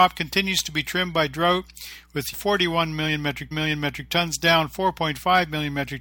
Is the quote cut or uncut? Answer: cut